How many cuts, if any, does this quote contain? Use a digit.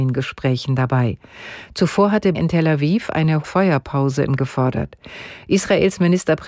3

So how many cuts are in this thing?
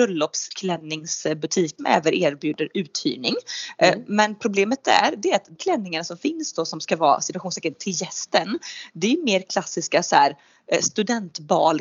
2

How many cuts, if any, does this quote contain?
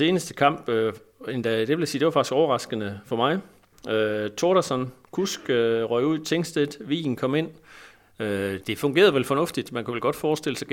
1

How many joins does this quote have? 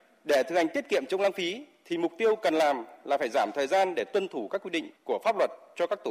1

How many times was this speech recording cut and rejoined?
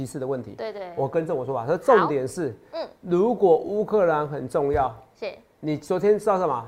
0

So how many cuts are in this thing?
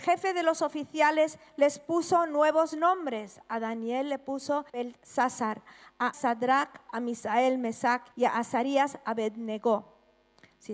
3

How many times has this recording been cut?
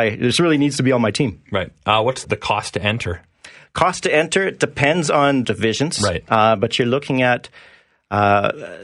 2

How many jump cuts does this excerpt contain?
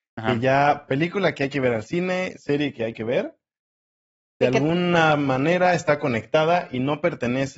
0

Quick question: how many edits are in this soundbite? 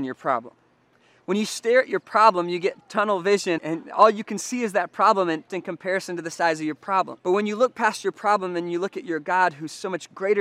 4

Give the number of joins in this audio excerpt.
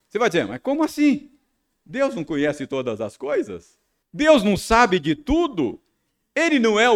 1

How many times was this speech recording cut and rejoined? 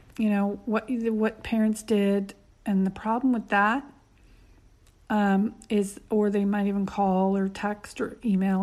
0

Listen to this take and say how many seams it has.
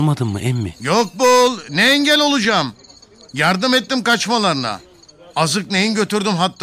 0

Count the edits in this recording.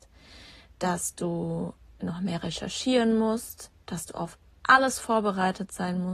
0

